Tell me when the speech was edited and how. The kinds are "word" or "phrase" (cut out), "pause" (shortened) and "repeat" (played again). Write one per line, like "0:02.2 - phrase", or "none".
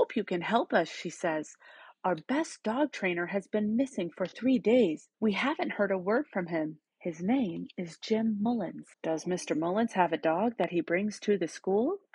0:05.1 - pause
0:06.9 - pause
0:08.9 - pause